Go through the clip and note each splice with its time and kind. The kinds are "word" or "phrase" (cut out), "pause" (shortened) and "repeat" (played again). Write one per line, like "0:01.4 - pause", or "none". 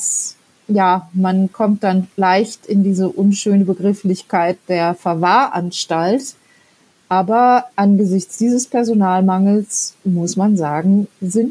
0:07.7 - word